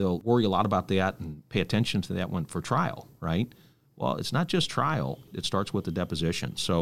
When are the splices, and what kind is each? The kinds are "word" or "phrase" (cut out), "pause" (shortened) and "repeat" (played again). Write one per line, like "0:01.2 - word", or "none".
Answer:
none